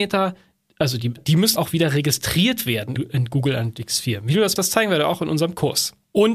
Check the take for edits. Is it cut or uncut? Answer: cut